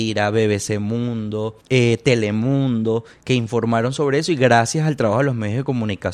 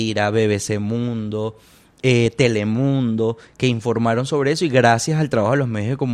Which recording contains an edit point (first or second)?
first